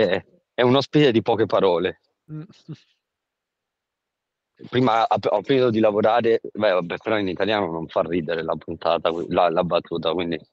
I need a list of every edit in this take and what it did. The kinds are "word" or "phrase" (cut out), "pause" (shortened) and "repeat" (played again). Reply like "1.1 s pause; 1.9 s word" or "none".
none